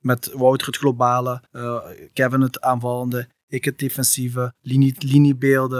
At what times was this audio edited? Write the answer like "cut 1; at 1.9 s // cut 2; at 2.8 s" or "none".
cut 1; at 1.5 s // cut 2; at 4.6 s